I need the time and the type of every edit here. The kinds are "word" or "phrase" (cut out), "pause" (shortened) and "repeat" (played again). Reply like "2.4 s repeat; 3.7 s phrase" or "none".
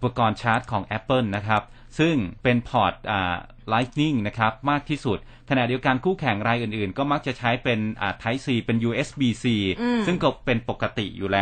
2.4 s pause